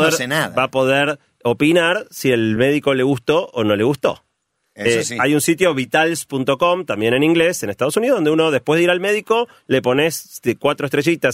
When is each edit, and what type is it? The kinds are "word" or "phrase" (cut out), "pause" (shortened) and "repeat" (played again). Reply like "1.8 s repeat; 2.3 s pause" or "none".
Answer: none